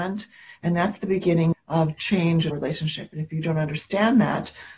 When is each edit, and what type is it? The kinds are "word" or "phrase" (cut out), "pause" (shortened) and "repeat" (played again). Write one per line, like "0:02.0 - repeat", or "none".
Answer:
0:01.5 - word
0:02.5 - word

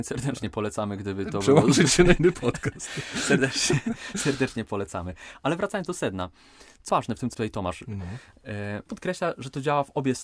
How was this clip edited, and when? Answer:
0:06.9 - word
0:07.3 - word
0:08.9 - word

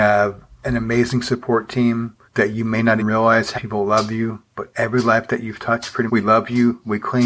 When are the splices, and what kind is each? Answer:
0:02.2 - pause
0:03.0 - word
0:03.5 - word
0:06.1 - word

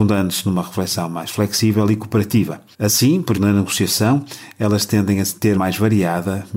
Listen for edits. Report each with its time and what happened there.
0:02.7 - pause
0:03.3 - word
0:05.5 - phrase

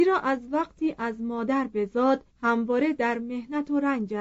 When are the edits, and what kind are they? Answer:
0:02.3 - pause

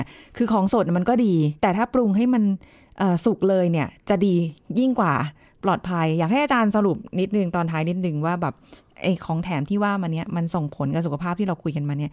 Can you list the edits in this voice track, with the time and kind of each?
0:01.6 - pause

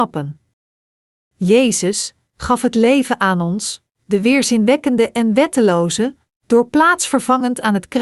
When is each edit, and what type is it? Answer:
none

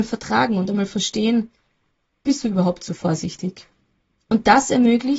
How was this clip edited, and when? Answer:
0:02.2 - word

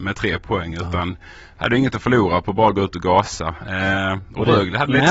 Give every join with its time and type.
none

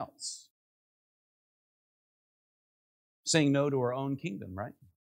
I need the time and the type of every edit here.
none

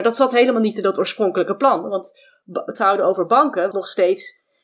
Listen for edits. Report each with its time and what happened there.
0:02.7 - word
0:03.7 - word

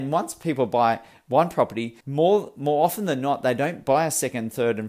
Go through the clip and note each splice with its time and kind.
0:02.0 - pause

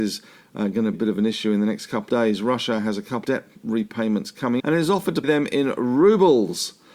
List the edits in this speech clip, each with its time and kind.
0:00.9 - word
0:02.1 - word
0:03.2 - word
0:04.6 - word
0:05.2 - word

